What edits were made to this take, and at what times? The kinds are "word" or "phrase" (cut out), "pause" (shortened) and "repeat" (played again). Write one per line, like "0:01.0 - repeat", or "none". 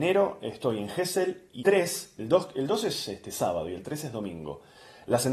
0:01.6 - word